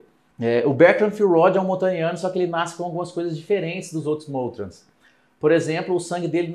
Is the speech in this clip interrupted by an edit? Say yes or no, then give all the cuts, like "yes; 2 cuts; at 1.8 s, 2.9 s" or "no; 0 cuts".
no; 0 cuts